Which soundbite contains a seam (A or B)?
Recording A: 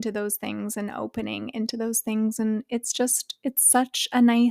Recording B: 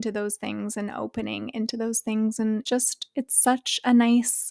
B